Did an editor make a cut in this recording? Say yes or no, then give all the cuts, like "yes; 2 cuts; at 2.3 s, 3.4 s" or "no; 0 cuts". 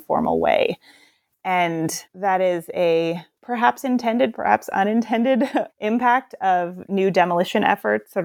yes; 2 cuts; at 2.0 s, 5.7 s